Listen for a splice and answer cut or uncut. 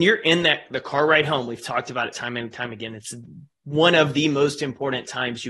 uncut